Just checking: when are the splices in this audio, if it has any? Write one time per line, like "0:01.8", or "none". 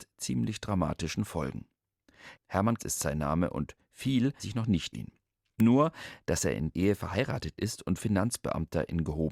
0:02.8
0:04.4
0:04.9
0:06.7
0:08.0